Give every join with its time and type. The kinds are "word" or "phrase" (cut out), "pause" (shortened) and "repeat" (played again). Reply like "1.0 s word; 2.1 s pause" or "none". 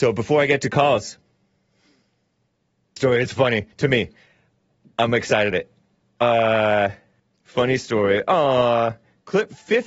3.0 s phrase; 3.7 s pause; 5.5 s word; 7.2 s pause